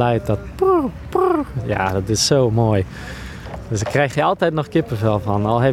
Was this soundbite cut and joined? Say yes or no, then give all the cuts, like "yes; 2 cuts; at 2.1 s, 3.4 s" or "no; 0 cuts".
no; 0 cuts